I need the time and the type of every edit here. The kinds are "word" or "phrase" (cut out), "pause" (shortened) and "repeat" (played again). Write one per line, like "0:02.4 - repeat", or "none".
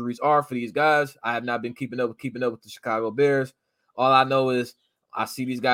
0:02.2 - repeat